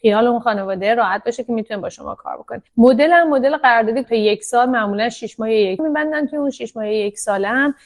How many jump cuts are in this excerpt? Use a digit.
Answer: 3